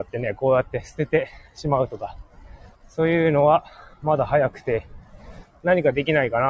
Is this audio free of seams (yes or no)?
no